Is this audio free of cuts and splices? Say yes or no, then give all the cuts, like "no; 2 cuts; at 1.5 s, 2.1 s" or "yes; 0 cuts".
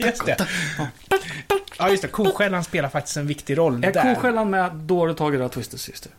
yes; 0 cuts